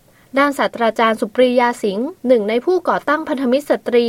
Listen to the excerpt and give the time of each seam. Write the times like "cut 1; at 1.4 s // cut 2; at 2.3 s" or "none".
cut 1; at 2.2 s